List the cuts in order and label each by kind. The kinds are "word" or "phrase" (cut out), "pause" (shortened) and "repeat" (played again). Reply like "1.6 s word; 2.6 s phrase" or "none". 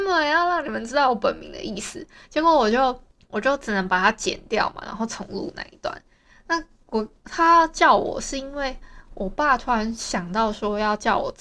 none